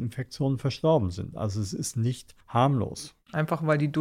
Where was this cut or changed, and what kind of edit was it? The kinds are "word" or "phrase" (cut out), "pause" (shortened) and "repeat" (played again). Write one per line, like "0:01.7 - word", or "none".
0:02.4 - pause